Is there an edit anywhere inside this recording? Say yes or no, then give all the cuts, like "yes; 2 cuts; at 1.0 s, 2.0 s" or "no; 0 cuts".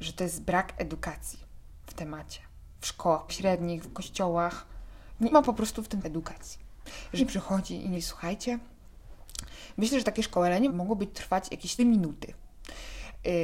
yes; 8 cuts; at 3.3 s, 3.8 s, 5.3 s, 6.0 s, 7.2 s, 7.9 s, 10.7 s, 11.8 s